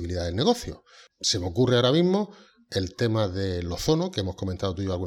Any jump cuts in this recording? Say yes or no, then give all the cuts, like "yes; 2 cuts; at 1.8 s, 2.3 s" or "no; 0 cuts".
no; 0 cuts